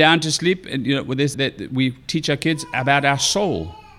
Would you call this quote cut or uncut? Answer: cut